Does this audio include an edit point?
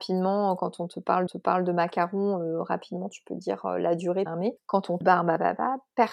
yes; 4 cuts; at 1.3 s, 4.3 s, 4.6 s, 5.0 s

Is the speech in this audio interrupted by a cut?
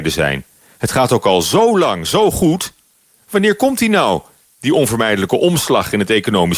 no; 0 cuts

